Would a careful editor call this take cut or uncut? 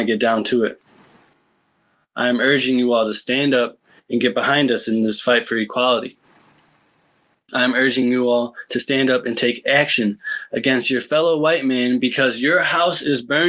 uncut